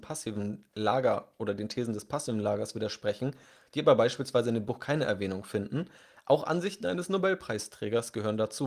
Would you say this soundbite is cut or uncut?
uncut